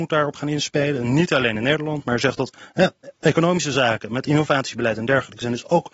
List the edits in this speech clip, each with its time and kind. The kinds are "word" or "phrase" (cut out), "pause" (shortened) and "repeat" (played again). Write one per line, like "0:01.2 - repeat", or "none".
none